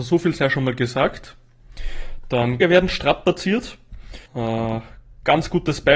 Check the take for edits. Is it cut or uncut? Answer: cut